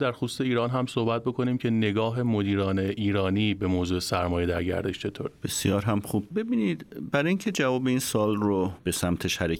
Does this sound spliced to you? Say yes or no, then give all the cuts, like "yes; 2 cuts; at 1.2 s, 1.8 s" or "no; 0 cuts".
no; 0 cuts